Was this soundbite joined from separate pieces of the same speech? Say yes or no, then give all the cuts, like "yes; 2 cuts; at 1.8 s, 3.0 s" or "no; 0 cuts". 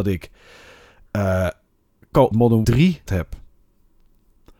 yes; 3 cuts; at 2.3 s, 2.6 s, 3.1 s